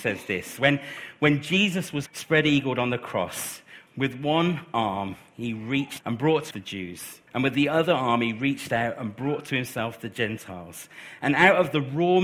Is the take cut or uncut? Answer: cut